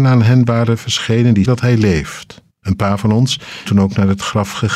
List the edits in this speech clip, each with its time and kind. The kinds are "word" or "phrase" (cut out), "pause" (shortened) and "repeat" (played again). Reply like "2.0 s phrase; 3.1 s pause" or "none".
1.5 s word; 2.5 s pause; 3.7 s word